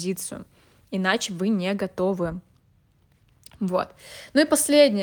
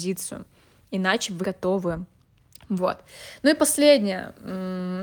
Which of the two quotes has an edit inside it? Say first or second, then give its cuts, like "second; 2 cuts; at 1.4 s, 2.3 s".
second; 2 cuts; at 1.4 s, 2.3 s